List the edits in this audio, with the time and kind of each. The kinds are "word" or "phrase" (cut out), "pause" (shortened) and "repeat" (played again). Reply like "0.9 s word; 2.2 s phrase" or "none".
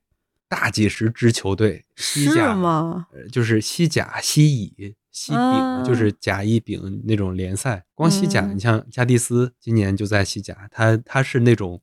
7.9 s pause; 9.6 s pause